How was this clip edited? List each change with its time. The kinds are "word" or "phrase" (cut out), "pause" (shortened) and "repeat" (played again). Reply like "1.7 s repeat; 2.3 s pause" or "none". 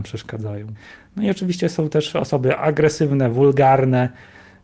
none